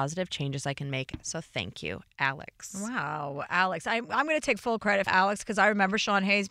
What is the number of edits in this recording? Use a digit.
1